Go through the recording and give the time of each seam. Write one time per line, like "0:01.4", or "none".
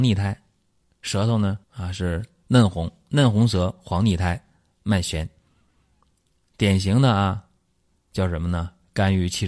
0:01.6